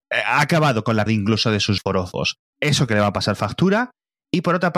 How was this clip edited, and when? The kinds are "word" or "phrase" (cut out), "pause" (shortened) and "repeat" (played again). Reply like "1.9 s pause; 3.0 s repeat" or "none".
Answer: 1.1 s word; 1.8 s word; 2.9 s word